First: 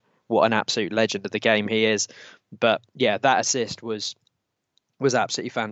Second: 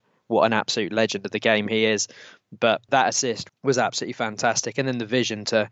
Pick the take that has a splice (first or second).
second